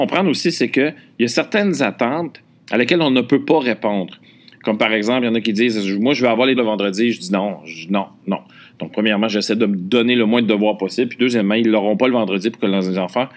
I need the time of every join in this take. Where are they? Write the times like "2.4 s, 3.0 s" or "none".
6.6 s